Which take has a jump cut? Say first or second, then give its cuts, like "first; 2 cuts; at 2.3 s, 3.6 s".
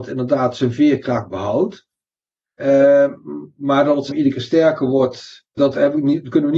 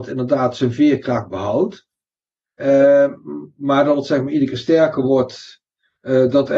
first; 2 cuts; at 4.1 s, 5.6 s